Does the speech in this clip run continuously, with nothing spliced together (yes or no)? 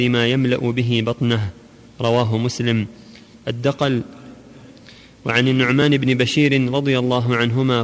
yes